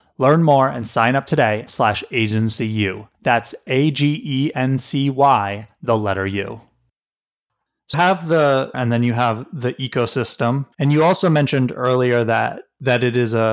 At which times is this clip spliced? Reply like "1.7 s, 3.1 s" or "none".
1.7 s, 3.1 s, 7.9 s, 8.7 s, 10.7 s